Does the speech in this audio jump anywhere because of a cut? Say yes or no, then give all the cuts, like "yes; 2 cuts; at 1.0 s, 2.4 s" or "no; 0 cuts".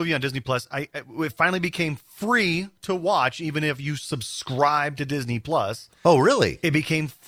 no; 0 cuts